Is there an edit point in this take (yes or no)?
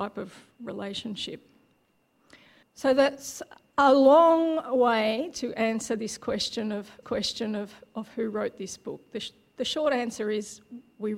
yes